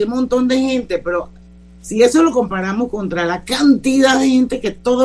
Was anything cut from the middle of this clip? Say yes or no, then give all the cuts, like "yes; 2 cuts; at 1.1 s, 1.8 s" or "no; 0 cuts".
no; 0 cuts